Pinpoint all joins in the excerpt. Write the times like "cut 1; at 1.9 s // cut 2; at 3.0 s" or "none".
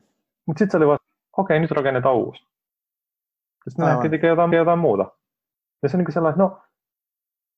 cut 1; at 1.0 s // cut 2; at 4.5 s